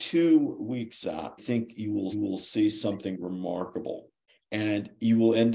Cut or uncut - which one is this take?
cut